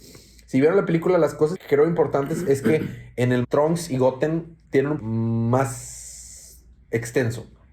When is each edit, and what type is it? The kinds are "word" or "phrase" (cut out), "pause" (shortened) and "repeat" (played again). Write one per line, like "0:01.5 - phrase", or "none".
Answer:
0:01.5 - word
0:03.4 - word
0:04.6 - pause
0:05.0 - word